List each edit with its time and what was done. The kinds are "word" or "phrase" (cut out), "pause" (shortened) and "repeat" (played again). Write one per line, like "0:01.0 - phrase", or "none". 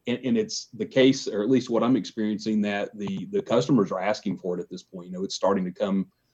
none